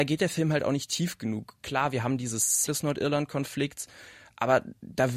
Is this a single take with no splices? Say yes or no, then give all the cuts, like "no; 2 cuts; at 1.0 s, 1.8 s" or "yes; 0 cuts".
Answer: no; 1 cut; at 2.7 s